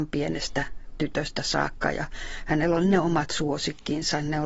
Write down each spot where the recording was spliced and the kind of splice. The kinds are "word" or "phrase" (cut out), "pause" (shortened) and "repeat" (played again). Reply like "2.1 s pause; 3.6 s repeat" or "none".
none